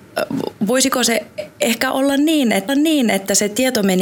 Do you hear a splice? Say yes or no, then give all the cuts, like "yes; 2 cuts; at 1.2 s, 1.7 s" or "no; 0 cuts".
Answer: yes; 1 cut; at 2.7 s